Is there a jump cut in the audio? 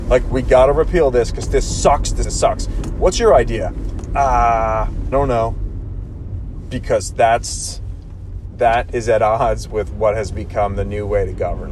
yes; 2 cuts; at 2.2 s, 5.1 s

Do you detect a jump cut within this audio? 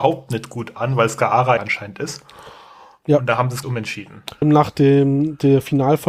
yes; 3 cuts; at 1.6 s, 3.6 s, 4.4 s

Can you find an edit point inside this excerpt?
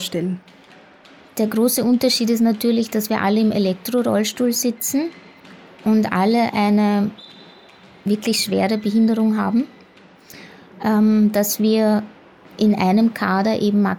no; 0 cuts

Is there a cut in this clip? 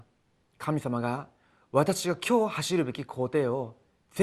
no; 0 cuts

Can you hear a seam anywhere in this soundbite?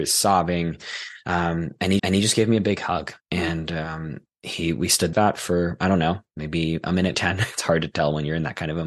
yes; 4 cuts; at 2.0 s, 3.2 s, 5.1 s, 7.1 s

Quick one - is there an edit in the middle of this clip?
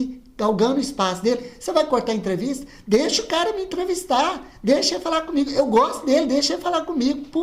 no; 0 cuts

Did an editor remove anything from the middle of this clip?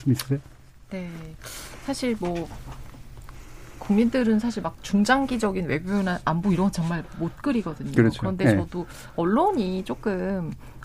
no; 0 cuts

